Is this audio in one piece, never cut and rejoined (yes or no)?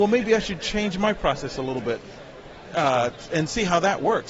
yes